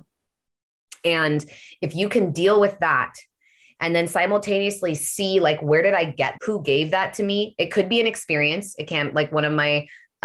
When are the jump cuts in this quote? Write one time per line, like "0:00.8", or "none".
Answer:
0:06.4